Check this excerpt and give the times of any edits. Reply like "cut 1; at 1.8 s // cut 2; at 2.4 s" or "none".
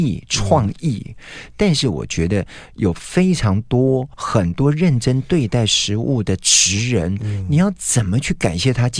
cut 1; at 4.1 s